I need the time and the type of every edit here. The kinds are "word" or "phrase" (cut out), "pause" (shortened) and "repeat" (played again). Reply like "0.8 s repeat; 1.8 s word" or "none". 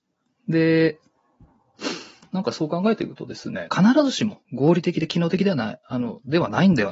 3.7 s phrase; 4.4 s pause